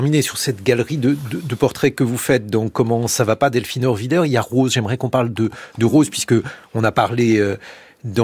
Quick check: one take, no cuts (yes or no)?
yes